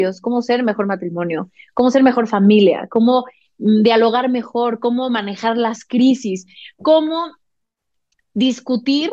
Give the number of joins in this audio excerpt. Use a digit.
0